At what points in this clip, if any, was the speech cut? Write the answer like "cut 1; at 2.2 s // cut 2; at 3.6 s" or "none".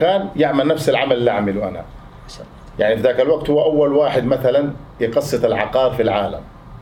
none